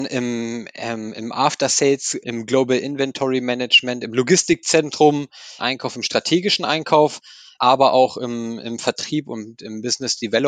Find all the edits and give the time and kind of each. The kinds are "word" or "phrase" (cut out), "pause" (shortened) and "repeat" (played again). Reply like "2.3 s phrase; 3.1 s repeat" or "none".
2.2 s word; 5.6 s phrase